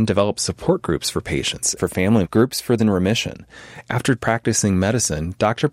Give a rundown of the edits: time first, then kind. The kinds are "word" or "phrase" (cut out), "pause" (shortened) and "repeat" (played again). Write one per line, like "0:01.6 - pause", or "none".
0:01.8 - phrase
0:02.2 - word
0:02.8 - word
0:04.2 - word